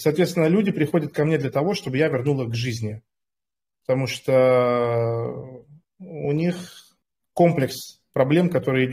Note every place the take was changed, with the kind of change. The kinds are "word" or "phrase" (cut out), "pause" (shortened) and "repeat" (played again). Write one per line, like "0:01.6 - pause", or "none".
none